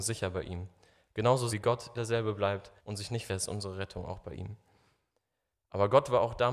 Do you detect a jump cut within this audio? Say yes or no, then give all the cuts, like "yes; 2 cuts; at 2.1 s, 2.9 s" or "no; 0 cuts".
yes; 4 cuts; at 1.5 s, 1.9 s, 2.8 s, 3.3 s